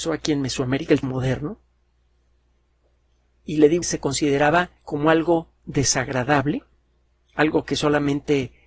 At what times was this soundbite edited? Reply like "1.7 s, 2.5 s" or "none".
1.0 s, 3.8 s, 4.8 s